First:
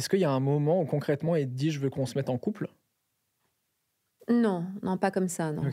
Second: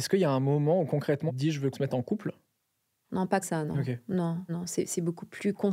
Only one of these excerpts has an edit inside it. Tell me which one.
second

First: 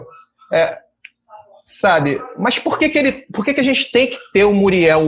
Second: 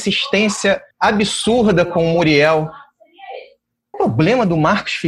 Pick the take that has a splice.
second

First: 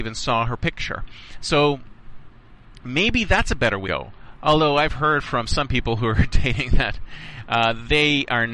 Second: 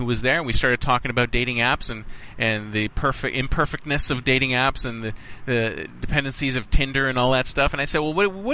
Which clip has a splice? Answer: first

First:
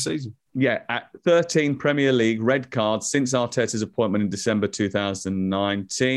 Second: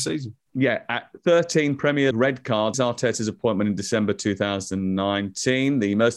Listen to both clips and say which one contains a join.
second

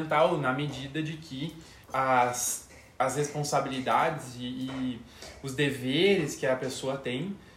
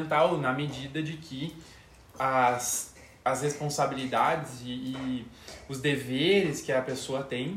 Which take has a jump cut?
first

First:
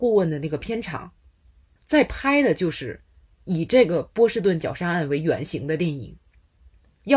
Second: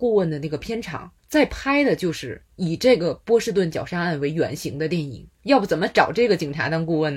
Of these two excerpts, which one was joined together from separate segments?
second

